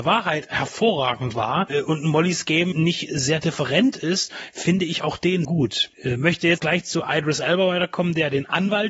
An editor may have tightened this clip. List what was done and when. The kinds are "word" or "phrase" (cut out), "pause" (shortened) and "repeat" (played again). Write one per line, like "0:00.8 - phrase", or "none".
0:02.7 - word
0:05.4 - word
0:06.6 - word